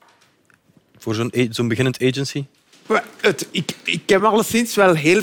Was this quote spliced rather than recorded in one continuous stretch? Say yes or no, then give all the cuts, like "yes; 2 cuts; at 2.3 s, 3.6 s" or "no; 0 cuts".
no; 0 cuts